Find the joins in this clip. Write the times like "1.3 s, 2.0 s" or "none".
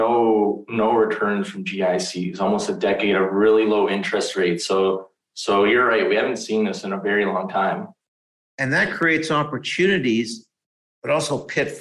none